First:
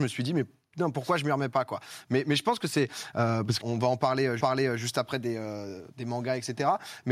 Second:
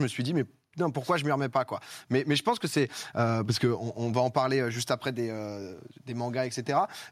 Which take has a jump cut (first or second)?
first